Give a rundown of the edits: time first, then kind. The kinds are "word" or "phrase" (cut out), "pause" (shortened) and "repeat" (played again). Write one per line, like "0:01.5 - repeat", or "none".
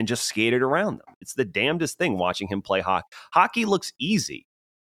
none